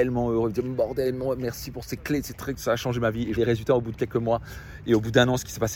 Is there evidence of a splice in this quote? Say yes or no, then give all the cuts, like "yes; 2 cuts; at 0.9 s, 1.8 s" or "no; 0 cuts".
yes; 1 cut; at 3.4 s